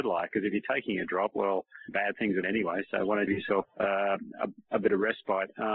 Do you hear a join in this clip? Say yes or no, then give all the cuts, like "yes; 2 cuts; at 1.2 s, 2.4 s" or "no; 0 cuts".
yes; 4 cuts; at 1.9 s, 2.4 s, 3.3 s, 3.6 s